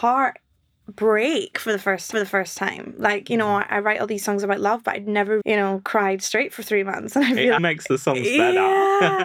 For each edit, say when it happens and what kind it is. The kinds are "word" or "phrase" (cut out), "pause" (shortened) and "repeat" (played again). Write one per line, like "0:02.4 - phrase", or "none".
0:02.1 - repeat
0:05.4 - word
0:07.6 - word